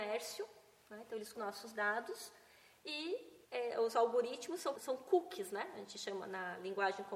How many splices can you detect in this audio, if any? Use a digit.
3